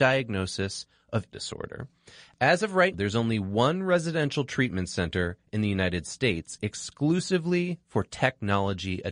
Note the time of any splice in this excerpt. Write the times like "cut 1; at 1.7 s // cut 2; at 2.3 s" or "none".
cut 1; at 1.3 s // cut 2; at 2.9 s